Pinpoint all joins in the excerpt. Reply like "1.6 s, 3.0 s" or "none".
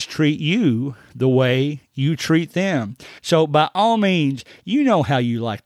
3.2 s

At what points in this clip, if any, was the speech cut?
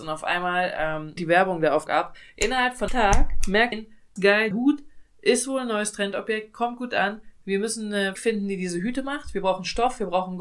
1.2 s, 1.9 s, 2.9 s, 3.7 s, 4.2 s, 4.5 s, 7.4 s, 8.2 s

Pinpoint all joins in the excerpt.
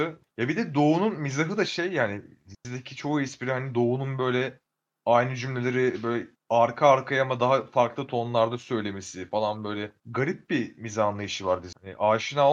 none

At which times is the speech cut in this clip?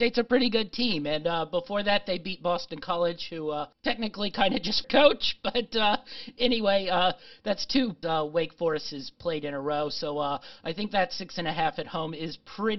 3.7 s, 4.8 s, 8.0 s

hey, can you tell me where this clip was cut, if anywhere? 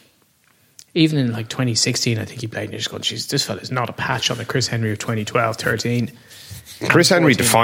none

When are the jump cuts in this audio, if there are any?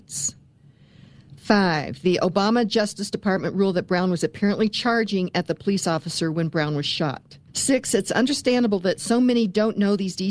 7.5 s

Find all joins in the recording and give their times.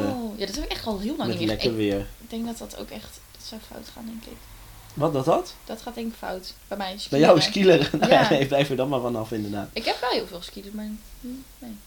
6.6 s

